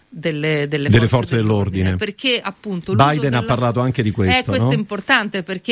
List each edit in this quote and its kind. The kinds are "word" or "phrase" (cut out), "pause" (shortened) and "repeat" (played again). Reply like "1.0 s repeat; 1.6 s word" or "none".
none